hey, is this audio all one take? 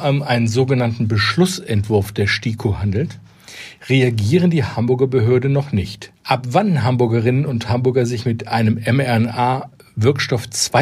no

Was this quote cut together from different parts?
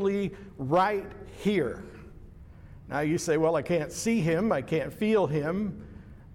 no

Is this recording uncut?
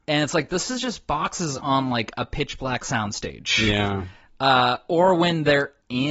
yes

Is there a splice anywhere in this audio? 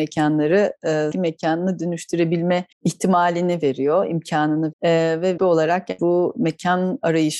yes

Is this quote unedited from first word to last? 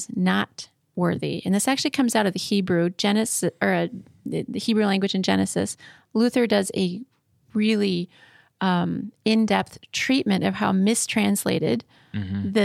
yes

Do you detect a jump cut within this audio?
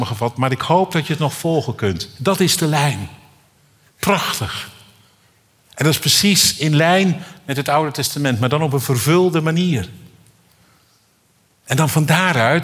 no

